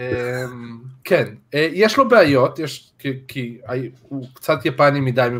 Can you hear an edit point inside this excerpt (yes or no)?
yes